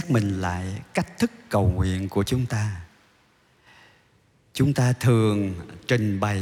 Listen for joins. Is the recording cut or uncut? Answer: uncut